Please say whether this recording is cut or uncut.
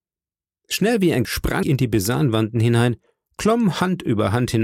cut